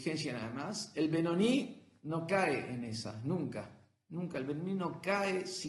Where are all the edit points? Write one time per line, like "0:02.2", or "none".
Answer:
none